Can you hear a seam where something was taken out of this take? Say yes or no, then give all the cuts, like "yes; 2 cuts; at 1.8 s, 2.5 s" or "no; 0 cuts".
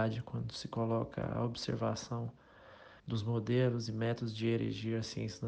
yes; 1 cut; at 3.0 s